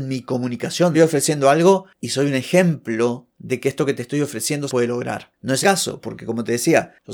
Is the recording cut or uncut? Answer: cut